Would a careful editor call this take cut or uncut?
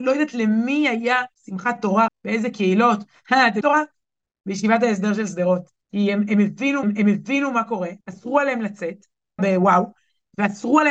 cut